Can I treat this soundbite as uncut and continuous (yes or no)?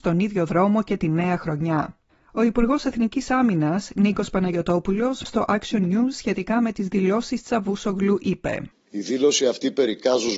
no